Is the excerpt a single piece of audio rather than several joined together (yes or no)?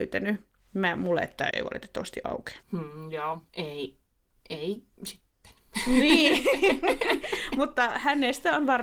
no